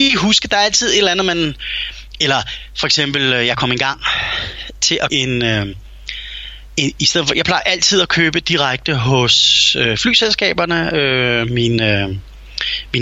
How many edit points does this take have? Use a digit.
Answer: 1